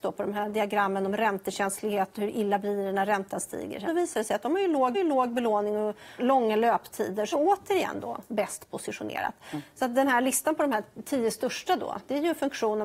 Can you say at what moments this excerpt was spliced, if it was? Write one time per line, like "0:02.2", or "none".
0:03.9
0:04.9
0:06.2
0:07.3